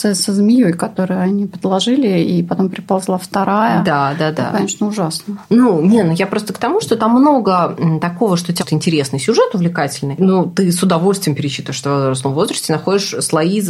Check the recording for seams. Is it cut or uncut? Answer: cut